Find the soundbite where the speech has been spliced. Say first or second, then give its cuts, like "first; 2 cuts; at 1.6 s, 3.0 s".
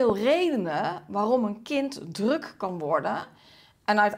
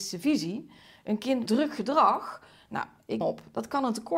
second; 2 cuts; at 1.5 s, 3.2 s